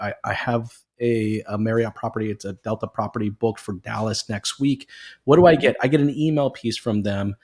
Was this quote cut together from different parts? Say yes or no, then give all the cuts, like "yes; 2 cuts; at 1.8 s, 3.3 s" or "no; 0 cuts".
no; 0 cuts